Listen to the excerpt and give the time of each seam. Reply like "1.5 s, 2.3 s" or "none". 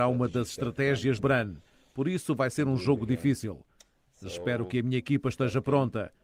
1.2 s